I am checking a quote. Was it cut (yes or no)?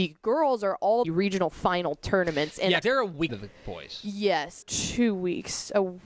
yes